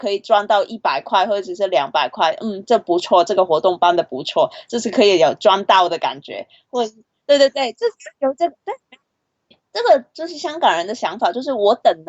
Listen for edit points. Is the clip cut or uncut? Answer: cut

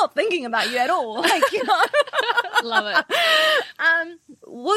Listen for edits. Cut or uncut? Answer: uncut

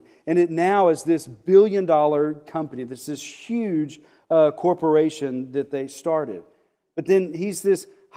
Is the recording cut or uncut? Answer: uncut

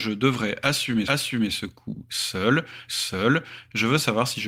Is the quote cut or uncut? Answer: cut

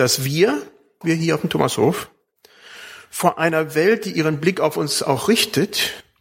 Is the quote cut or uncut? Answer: cut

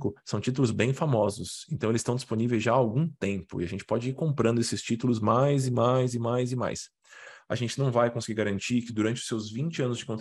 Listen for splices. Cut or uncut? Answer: uncut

